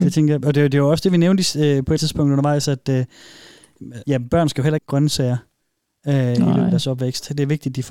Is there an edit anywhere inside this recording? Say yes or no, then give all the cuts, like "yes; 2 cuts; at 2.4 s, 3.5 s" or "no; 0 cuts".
yes; 3 cuts; at 2.0 s, 4.0 s, 4.8 s